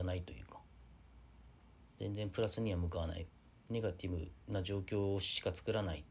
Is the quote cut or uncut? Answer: uncut